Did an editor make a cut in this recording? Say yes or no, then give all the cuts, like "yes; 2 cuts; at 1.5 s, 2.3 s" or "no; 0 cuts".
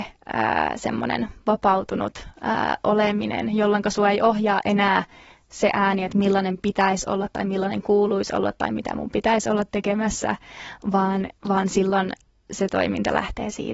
no; 0 cuts